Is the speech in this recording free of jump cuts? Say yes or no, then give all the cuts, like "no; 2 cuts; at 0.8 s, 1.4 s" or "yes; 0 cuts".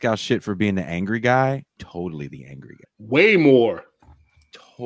no; 2 cuts; at 1.8 s, 2.8 s